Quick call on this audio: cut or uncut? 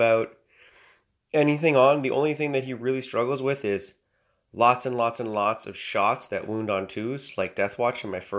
uncut